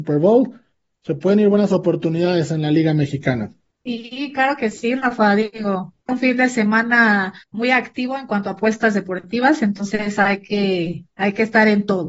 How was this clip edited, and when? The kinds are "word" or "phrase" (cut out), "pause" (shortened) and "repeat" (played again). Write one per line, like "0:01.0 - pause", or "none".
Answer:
0:06.0 - pause
0:07.4 - pause